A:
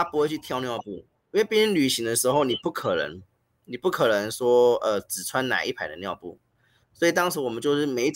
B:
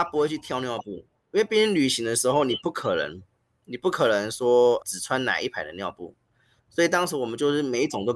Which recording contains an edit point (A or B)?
B